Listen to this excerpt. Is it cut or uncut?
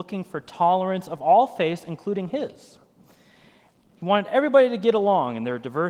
uncut